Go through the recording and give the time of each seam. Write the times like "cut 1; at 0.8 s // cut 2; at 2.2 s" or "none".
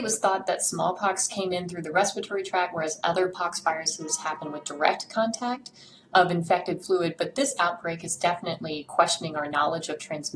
none